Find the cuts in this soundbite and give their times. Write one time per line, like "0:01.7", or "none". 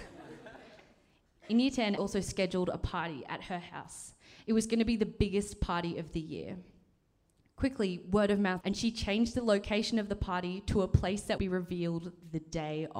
0:02.0
0:08.6
0:11.4